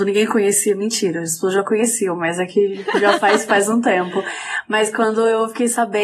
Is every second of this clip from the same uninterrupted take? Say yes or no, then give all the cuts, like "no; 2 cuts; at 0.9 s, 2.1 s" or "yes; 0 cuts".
yes; 0 cuts